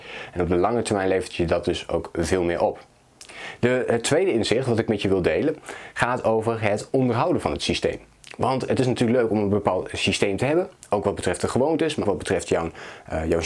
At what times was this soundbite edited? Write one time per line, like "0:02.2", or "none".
0:12.0